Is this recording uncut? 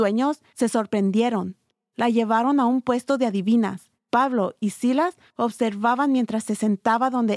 yes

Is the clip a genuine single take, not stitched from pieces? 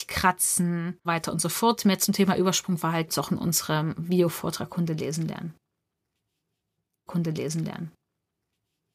no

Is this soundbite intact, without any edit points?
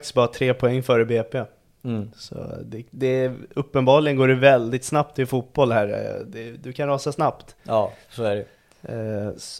no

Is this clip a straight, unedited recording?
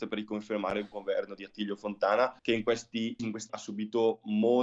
no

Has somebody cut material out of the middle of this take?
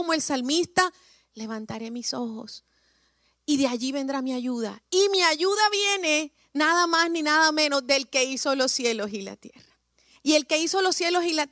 no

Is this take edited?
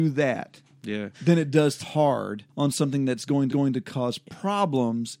yes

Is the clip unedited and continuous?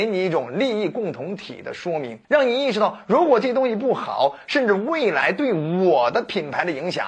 no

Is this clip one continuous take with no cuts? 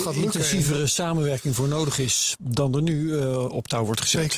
yes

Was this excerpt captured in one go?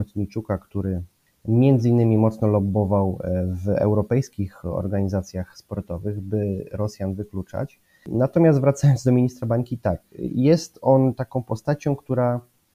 yes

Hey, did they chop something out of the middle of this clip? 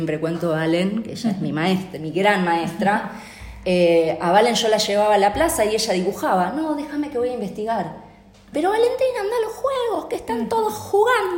yes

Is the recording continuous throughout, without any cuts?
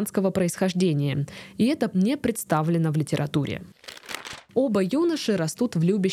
no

